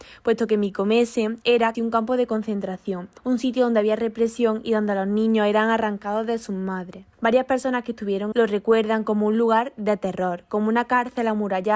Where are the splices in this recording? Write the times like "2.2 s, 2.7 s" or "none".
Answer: 1.7 s, 3.2 s, 7.1 s, 8.3 s